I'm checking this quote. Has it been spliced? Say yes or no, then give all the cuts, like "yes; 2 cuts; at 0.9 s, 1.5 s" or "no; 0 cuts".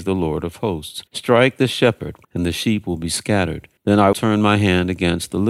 yes; 4 cuts; at 1.1 s, 2.2 s, 3.8 s, 4.1 s